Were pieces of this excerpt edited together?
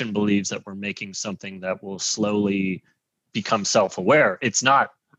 no; 0 cuts

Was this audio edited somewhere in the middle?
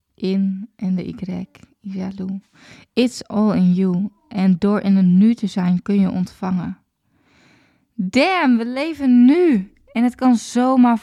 no; 0 cuts

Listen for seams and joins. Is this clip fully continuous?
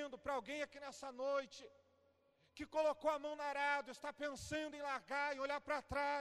yes; 0 cuts

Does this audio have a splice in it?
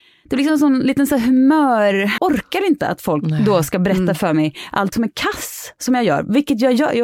yes; 2 cuts; at 2.2 s, 4.9 s

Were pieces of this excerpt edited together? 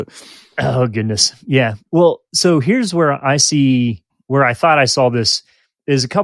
yes; 1 cut; at 4.1 s

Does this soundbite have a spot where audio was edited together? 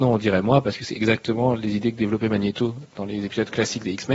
no; 0 cuts

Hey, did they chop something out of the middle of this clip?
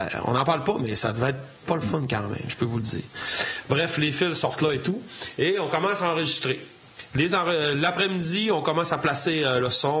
yes; 1 cut; at 1.6 s

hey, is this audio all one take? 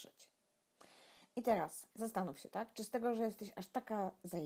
no; 1 cut; at 1.9 s

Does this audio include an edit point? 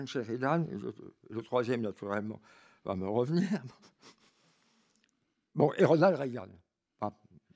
no; 0 cuts

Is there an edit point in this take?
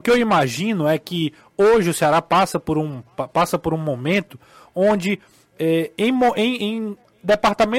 no; 0 cuts

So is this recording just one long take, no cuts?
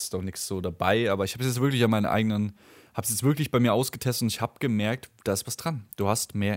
yes; 0 cuts

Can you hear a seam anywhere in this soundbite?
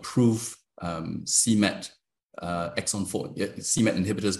no; 0 cuts

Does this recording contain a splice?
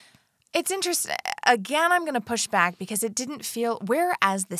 no; 0 cuts

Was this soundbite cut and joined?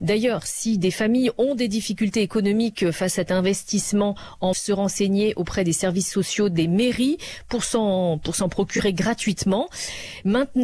yes; 2 cuts; at 3.3 s, 4.5 s

